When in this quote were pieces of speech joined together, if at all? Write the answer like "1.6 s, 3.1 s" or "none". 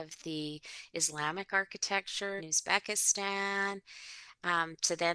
2.4 s